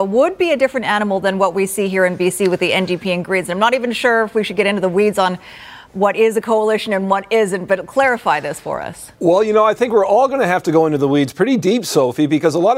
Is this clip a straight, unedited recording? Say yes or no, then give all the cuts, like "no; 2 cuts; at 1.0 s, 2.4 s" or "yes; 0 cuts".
no; 1 cut; at 9.1 s